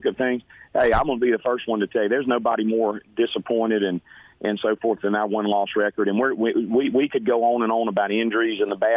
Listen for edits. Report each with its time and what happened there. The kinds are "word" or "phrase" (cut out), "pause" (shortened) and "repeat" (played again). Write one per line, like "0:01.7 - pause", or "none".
none